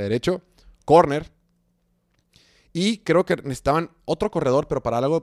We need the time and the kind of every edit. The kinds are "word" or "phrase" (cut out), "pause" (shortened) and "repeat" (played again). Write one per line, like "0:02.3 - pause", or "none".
none